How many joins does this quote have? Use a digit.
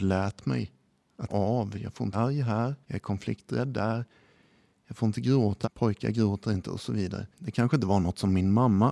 5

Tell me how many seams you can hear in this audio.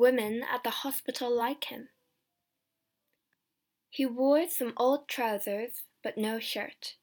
0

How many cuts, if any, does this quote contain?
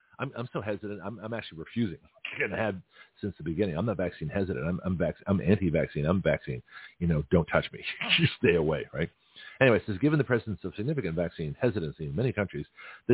0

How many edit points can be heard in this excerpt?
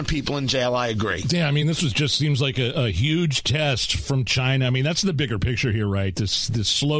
0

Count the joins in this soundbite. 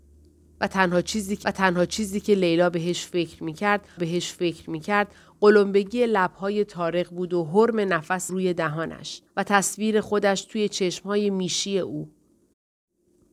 4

